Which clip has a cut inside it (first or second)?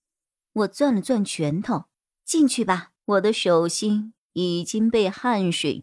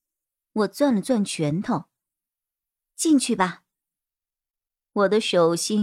first